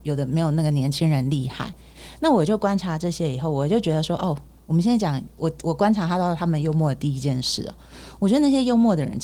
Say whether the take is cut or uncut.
uncut